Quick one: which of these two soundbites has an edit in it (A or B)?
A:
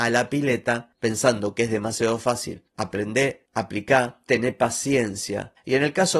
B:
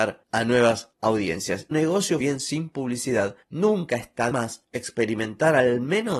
B